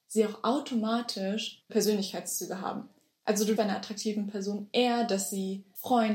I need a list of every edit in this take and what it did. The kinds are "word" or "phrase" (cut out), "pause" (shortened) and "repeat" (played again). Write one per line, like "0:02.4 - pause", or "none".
0:01.7 - word
0:03.6 - word

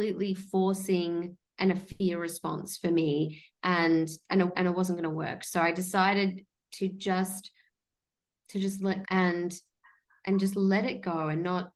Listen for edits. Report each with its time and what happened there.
0:04.5 - word
0:09.0 - word

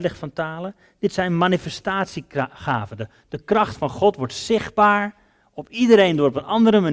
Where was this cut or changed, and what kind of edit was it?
none

